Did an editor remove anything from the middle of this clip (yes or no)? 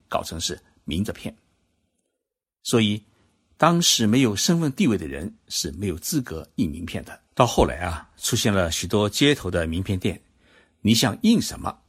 yes